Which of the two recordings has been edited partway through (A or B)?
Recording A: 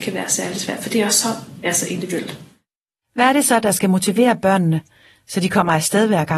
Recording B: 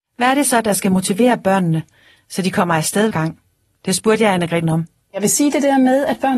B